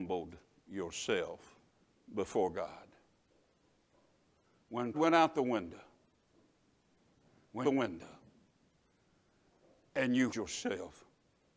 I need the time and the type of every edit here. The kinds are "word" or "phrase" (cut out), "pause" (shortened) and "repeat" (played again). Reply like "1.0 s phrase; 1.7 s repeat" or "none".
1.7 s pause; 4.9 s word; 7.6 s phrase; 10.3 s word